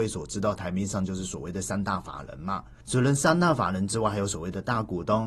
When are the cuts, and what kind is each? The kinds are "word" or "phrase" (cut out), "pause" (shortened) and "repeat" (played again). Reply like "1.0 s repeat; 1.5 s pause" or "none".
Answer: 2.8 s pause